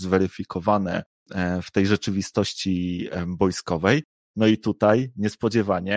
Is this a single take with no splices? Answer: yes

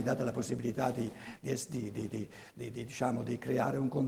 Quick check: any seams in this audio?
no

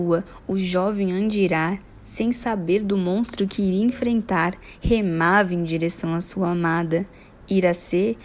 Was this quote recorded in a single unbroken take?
yes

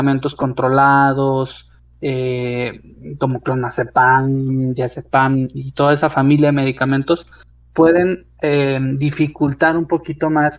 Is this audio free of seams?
yes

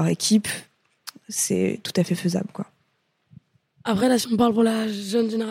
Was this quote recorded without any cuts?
yes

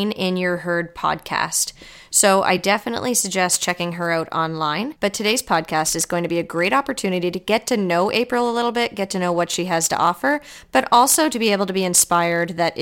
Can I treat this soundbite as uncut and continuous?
yes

